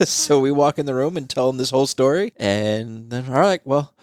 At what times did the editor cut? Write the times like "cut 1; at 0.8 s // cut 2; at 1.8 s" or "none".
none